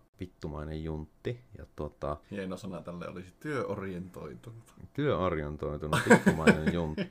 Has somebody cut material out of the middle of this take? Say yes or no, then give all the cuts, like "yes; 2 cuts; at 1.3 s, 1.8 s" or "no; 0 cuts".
yes; 2 cuts; at 1.5 s, 2.2 s